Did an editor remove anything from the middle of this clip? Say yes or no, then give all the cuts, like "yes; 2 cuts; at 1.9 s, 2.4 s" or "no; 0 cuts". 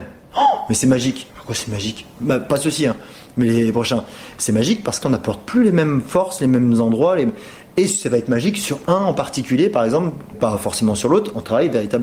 yes; 3 cuts; at 1.3 s, 5.0 s, 10.3 s